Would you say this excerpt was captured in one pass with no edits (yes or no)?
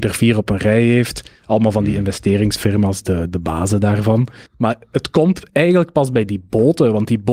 no